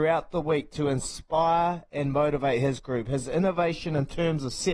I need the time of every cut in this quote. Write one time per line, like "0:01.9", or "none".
none